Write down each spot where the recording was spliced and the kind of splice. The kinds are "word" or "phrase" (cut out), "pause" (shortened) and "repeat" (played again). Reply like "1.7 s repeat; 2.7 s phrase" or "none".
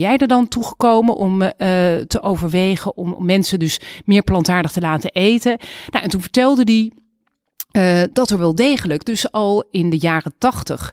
none